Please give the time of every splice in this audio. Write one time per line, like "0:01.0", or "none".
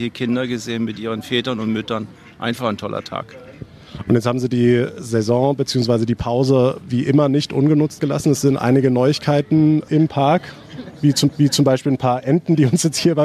0:11.3